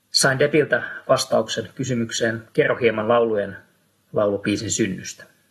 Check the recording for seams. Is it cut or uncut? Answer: uncut